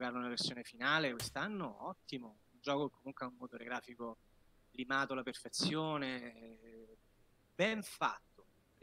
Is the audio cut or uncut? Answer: uncut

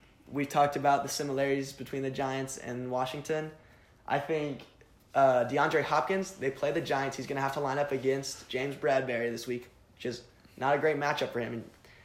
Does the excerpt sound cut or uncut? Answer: uncut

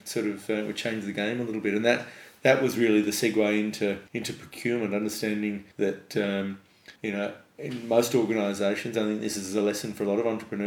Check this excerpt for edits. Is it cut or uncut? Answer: cut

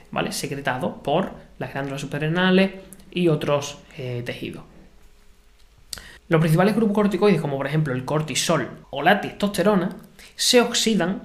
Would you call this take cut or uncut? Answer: cut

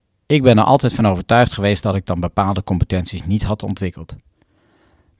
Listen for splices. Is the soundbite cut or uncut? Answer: uncut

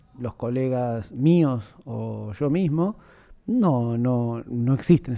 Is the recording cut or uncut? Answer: uncut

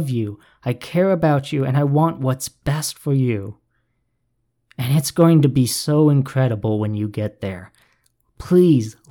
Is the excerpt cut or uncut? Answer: uncut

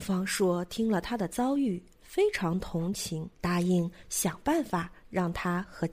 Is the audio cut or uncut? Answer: cut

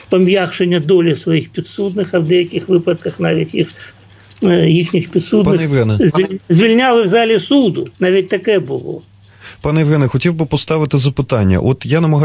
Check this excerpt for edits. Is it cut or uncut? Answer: cut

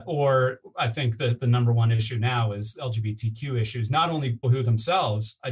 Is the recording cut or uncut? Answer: cut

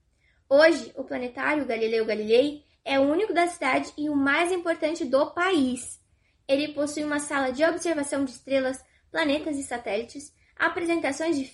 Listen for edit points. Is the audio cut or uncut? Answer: uncut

